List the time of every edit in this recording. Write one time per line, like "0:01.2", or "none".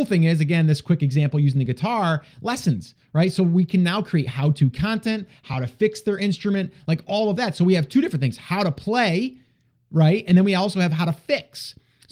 none